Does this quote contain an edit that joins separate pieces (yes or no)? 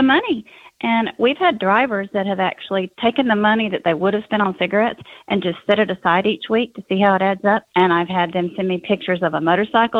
no